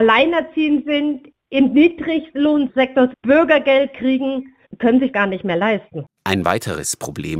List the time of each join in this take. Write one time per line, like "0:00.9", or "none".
0:03.1
0:04.8
0:05.1